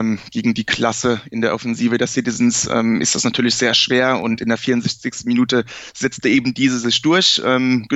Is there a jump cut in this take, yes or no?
no